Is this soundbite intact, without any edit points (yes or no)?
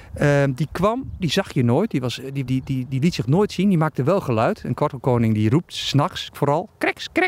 no